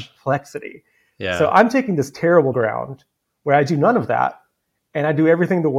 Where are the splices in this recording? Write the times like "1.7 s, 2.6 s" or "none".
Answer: 2.5 s